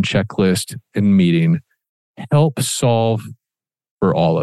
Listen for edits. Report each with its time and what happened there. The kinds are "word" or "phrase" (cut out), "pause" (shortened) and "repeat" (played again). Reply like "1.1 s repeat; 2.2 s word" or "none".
0.9 s word